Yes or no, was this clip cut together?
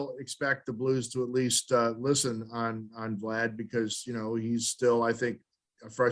no